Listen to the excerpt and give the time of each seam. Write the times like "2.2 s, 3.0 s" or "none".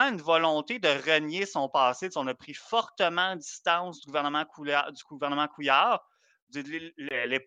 none